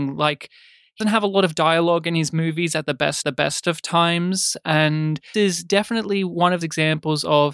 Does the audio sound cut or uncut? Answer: cut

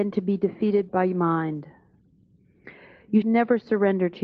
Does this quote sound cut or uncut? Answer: cut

